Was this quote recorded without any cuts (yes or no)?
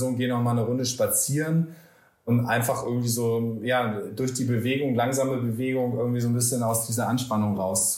yes